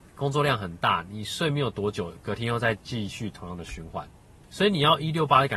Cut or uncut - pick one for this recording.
cut